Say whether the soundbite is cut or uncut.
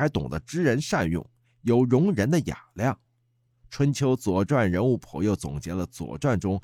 uncut